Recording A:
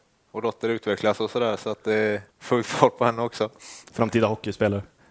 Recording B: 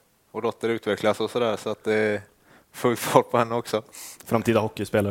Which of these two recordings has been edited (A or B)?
A